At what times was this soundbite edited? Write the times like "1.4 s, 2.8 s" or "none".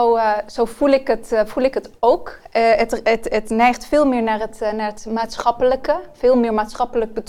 none